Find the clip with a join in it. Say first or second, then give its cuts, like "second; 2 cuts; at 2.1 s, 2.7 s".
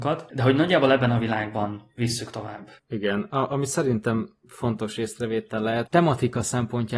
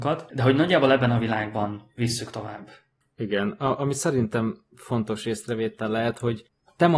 first; 2 cuts; at 2.8 s, 5.9 s